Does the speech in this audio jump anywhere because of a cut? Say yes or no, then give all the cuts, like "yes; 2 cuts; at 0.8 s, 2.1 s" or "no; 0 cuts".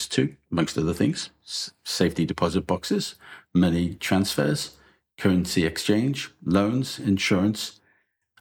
no; 0 cuts